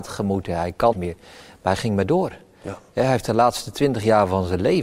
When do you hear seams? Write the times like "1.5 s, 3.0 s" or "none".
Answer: 0.9 s